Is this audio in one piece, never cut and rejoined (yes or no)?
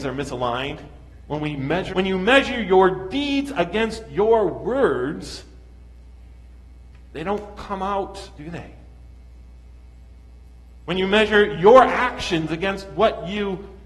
no